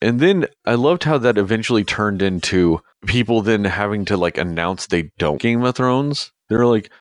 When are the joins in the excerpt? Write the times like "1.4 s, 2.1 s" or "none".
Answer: 5.4 s